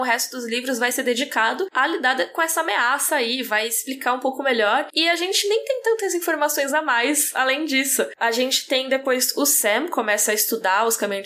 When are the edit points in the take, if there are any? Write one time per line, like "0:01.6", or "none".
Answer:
none